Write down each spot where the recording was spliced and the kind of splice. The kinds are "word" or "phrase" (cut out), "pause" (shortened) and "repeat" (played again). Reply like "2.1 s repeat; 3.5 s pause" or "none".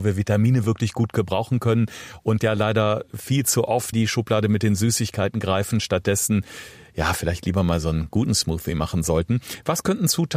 3.9 s word